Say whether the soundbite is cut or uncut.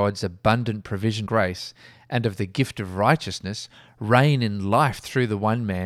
cut